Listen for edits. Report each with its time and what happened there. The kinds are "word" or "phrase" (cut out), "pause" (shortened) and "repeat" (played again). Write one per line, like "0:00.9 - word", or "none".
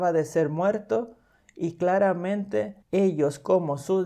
0:02.8 - pause